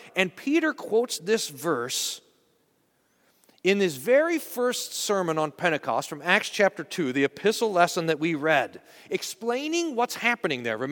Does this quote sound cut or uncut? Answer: uncut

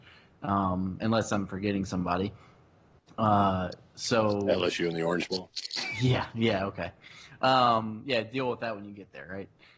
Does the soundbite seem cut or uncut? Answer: uncut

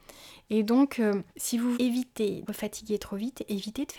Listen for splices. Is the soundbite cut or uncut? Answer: cut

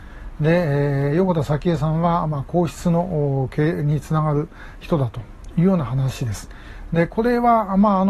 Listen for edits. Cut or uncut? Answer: uncut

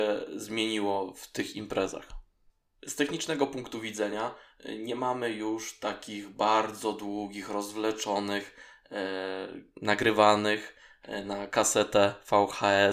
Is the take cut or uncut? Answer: uncut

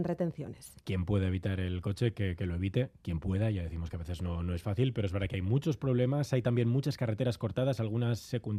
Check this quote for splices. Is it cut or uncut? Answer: uncut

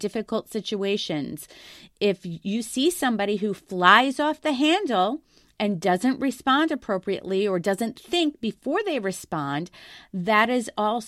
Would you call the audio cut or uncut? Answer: uncut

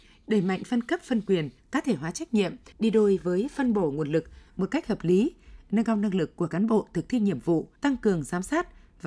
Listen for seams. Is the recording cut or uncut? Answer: cut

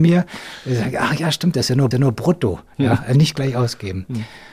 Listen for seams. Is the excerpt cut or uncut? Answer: cut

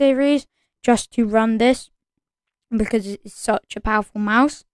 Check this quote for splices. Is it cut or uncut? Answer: uncut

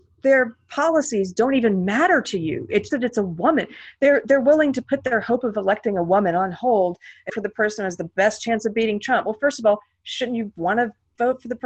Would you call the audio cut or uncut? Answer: cut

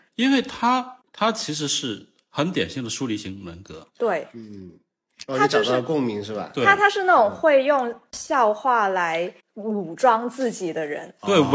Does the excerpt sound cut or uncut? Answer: uncut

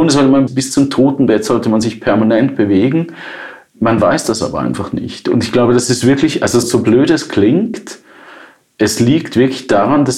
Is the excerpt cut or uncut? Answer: uncut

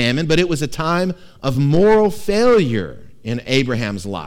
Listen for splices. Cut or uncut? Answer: uncut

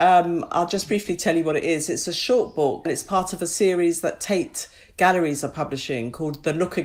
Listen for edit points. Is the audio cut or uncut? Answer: cut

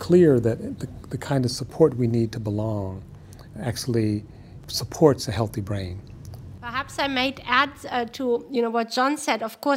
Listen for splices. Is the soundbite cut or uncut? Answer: uncut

